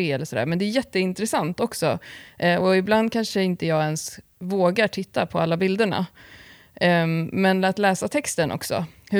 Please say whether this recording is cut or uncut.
uncut